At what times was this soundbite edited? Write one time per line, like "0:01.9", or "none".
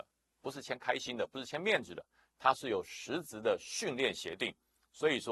none